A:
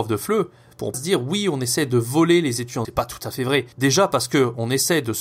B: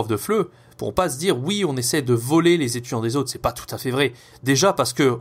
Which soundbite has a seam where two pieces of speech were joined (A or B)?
A